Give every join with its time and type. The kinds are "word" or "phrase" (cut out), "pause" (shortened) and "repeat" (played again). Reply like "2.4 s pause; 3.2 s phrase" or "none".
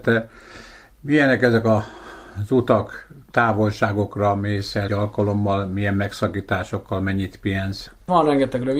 3.3 s word; 4.9 s word